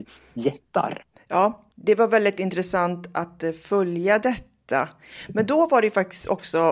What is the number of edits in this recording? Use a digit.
1